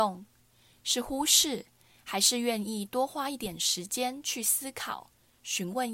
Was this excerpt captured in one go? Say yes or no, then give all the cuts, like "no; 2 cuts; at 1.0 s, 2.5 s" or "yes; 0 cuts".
yes; 0 cuts